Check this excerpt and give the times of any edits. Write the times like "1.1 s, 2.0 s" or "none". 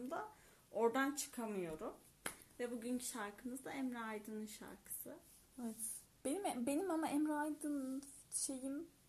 none